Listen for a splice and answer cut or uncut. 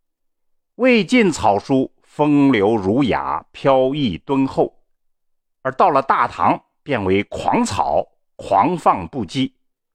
uncut